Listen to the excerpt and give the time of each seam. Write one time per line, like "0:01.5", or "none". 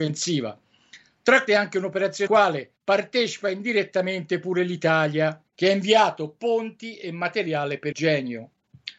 0:01.5
0:02.3
0:02.8
0:05.5
0:07.9

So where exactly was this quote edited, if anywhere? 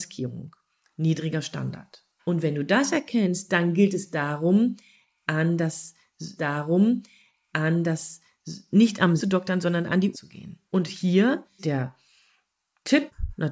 0:02.2
0:06.4
0:09.2
0:10.1
0:10.7
0:11.6

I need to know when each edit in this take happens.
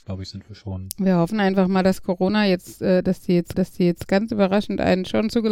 0:03.5

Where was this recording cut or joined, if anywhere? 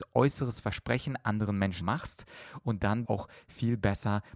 0:01.8
0:03.0

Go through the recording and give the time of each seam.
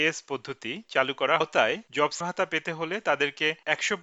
0:01.4
0:02.2

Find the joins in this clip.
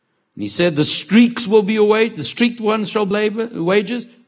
0:03.1

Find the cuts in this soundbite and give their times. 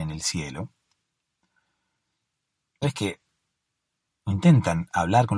0:02.8

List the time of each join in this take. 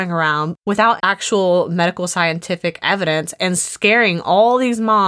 0:01.0

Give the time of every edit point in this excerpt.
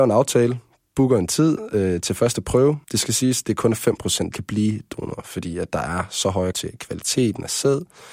0:02.8
0:04.3
0:06.5

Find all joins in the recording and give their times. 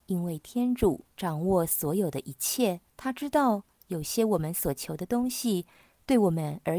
0:01.1
0:02.9

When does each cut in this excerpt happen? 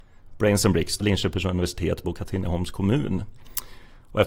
0:01.0
0:02.0

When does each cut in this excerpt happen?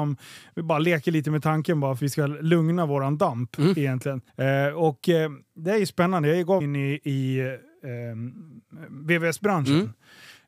0:02.0
0:04.3
0:06.6

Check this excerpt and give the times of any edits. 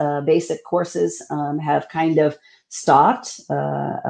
none

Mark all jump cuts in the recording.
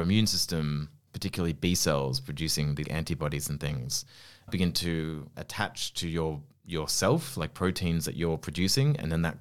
0:02.8

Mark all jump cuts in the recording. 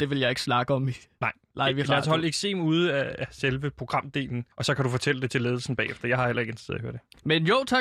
0:04.5

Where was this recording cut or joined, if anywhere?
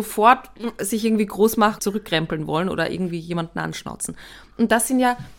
0:01.8

